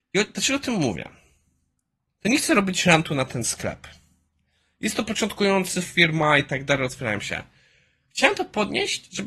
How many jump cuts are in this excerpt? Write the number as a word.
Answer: zero